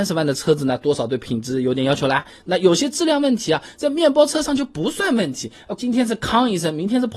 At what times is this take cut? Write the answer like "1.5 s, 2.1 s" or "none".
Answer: 5.8 s